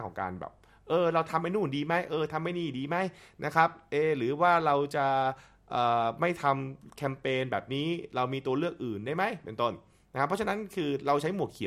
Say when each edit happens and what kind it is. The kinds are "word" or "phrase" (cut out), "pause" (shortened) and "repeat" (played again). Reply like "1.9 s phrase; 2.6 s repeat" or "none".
none